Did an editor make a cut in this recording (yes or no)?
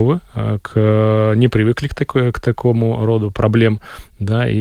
no